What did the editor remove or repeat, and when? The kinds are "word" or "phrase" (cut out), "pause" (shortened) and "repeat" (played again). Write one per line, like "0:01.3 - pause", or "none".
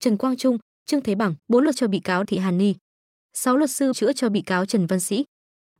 0:01.4 - pause
0:01.7 - phrase
0:02.2 - word
0:03.9 - word